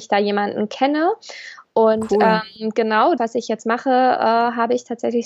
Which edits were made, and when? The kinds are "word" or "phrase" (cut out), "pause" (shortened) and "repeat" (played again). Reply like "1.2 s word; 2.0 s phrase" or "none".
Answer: 3.2 s word